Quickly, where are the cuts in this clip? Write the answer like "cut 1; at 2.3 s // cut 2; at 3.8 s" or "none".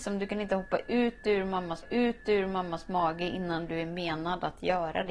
cut 1; at 1.8 s